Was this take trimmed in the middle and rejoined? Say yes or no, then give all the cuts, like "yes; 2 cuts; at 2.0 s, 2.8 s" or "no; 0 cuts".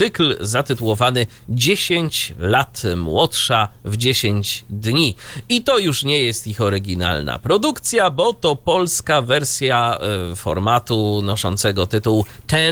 no; 0 cuts